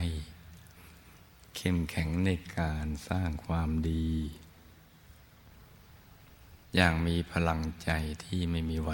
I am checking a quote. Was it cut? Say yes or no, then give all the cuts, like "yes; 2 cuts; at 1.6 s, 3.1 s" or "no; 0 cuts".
no; 0 cuts